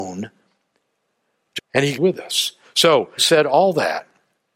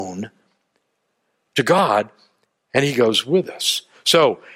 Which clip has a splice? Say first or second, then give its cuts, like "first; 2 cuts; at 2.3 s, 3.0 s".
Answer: first; 3 cuts; at 1.6 s, 1.9 s, 3.2 s